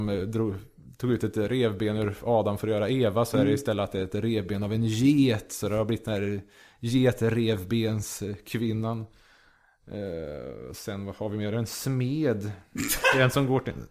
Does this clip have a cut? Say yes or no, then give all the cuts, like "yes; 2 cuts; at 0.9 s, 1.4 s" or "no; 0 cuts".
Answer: no; 0 cuts